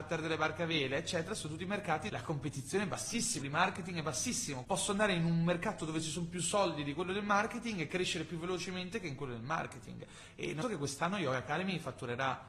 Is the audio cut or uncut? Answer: cut